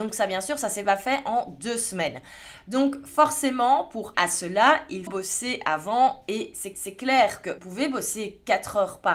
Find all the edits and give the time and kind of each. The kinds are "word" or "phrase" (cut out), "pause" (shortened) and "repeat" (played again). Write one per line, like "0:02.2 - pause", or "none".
0:04.1 - word
0:05.1 - word
0:06.7 - repeat
0:07.6 - word